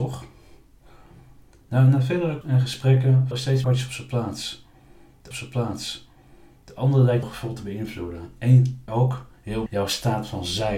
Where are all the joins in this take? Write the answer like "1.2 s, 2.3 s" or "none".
2.4 s, 3.3 s, 3.6 s, 5.3 s, 7.2 s, 8.9 s, 9.7 s